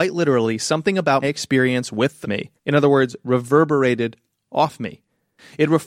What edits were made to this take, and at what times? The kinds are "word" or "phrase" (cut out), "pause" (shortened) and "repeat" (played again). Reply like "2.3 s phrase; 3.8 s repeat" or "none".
1.2 s word; 2.2 s phrase; 2.6 s pause